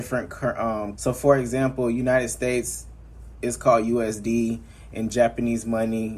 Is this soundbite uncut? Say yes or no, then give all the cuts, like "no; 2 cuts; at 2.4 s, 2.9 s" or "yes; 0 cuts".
no; 1 cut; at 1.0 s